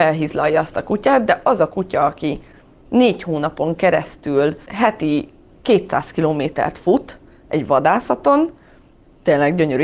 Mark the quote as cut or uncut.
uncut